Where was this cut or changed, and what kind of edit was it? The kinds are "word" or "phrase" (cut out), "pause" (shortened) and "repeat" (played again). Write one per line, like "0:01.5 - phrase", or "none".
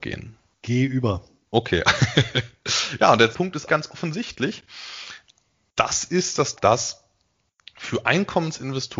0:03.3 - word
0:03.7 - word
0:06.6 - word